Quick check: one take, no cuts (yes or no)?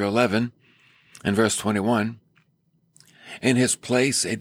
yes